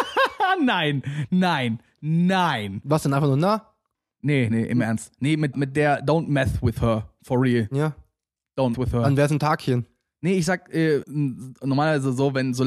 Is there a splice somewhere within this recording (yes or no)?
yes